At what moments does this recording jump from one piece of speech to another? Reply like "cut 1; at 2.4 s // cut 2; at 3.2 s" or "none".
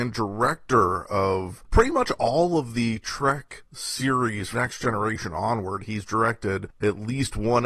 cut 1; at 4.5 s